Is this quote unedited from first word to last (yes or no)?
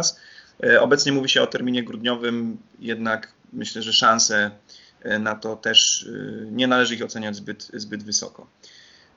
yes